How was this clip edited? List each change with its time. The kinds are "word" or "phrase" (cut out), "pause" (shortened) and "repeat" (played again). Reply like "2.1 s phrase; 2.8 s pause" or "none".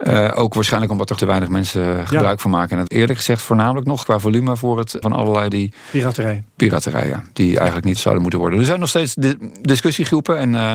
1.2 s word; 2.9 s word; 4.0 s word; 5.0 s word; 5.5 s word; 8.0 s word